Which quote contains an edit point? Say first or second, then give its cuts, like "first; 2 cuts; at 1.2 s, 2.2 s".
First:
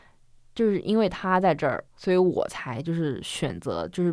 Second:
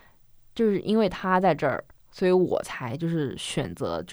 first; 1 cut; at 1.9 s